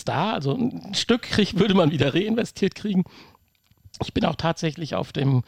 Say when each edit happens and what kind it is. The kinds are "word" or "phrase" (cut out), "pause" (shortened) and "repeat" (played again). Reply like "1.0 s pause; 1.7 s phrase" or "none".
none